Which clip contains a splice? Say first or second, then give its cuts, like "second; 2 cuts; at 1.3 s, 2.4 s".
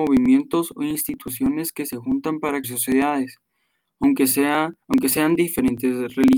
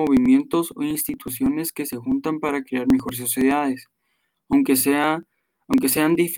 first; 2 cuts; at 2.6 s, 4.8 s